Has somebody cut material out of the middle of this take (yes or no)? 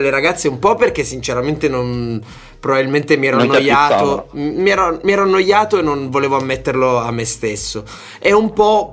no